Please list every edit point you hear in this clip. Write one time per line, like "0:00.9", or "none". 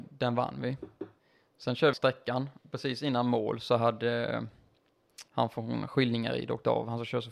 0:01.2
0:01.9
0:02.6
0:05.3